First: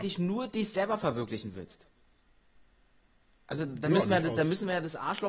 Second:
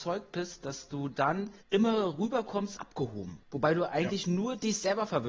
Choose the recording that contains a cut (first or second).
second